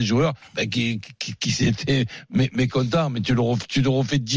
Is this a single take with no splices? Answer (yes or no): yes